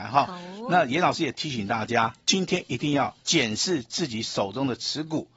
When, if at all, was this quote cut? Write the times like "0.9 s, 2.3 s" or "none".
3.2 s